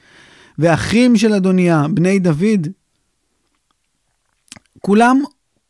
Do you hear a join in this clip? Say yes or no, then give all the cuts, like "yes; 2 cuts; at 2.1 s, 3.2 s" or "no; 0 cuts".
no; 0 cuts